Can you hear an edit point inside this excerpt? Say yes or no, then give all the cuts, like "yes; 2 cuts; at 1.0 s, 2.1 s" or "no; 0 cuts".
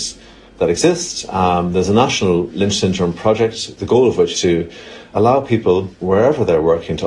yes; 2 cuts; at 4.4 s, 5.9 s